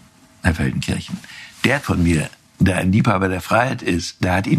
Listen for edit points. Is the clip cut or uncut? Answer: cut